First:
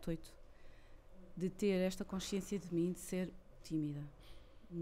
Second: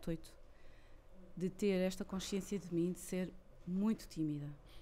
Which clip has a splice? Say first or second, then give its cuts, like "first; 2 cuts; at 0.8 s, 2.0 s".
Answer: first; 1 cut; at 3.6 s